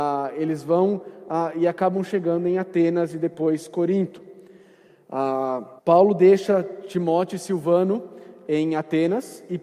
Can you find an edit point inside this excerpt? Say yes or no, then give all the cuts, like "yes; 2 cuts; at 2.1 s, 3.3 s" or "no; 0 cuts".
yes; 1 cut; at 5.8 s